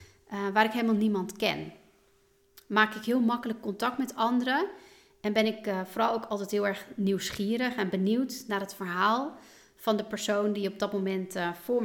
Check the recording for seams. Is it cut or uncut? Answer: uncut